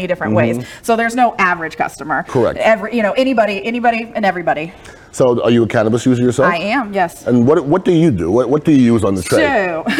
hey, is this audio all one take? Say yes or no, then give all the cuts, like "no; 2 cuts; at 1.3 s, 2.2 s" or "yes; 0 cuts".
yes; 0 cuts